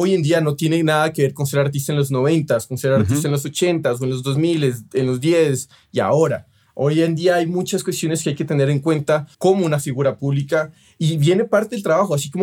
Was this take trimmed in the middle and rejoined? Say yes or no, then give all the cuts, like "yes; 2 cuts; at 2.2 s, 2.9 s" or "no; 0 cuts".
yes; 1 cut; at 9.3 s